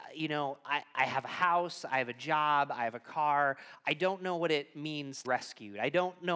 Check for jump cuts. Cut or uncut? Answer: cut